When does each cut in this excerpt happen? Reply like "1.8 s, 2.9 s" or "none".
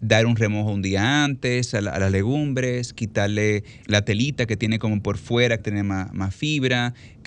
3.8 s, 5.6 s

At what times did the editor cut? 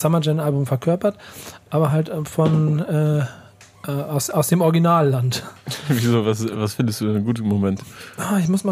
none

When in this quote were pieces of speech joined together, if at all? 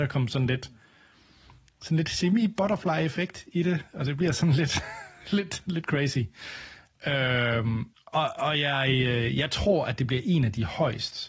7.9 s

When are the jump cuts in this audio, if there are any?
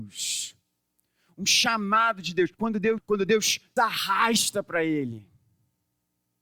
2.5 s, 3.0 s, 3.8 s

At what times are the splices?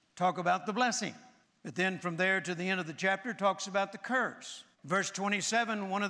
1.4 s, 4.7 s

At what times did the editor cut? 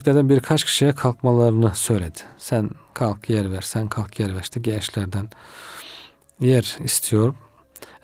none

